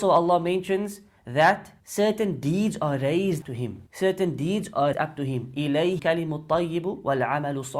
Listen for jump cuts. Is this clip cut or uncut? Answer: cut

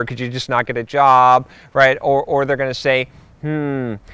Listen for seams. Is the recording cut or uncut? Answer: uncut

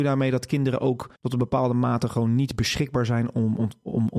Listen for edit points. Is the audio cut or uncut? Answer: cut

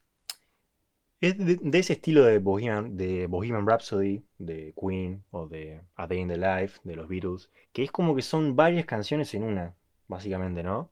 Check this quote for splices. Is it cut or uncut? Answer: cut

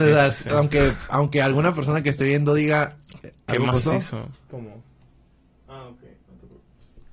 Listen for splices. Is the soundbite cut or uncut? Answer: uncut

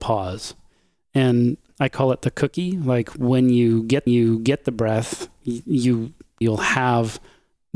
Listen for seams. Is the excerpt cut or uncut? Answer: cut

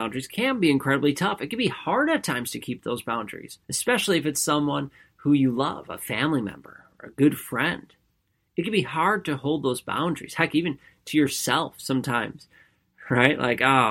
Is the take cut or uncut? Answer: cut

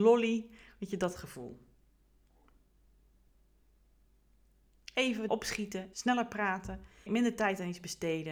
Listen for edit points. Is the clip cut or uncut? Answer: cut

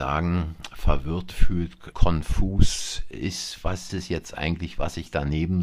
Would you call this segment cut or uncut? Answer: cut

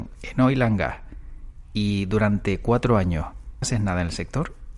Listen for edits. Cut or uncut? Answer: cut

